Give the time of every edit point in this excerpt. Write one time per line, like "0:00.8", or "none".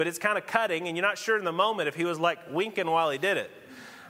none